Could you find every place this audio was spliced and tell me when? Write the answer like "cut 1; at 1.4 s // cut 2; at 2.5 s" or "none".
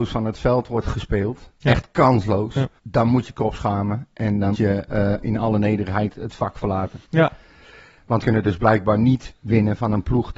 cut 1; at 2.8 s // cut 2; at 3.2 s // cut 3; at 4.5 s // cut 4; at 7.0 s // cut 5; at 8.2 s